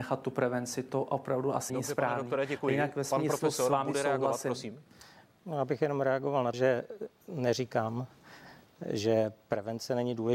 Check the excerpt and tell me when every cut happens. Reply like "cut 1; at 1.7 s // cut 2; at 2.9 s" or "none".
cut 1; at 1.7 s // cut 2; at 6.5 s